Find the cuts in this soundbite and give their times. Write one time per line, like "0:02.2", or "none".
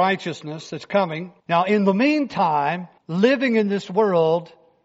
0:01.4
0:03.0